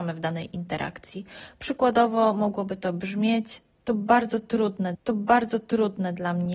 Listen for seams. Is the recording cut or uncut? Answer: cut